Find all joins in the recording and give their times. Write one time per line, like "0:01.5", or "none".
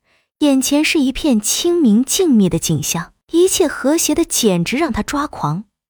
0:03.2